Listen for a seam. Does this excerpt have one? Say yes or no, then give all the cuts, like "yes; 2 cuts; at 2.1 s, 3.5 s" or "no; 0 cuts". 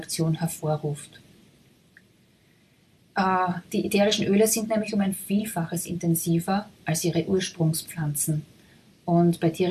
no; 0 cuts